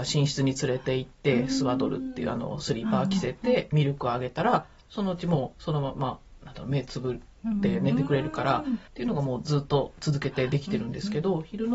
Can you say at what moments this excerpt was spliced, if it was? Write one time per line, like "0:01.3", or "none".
0:08.9